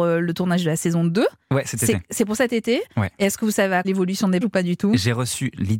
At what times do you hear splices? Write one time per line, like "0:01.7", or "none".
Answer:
0:03.8
0:04.4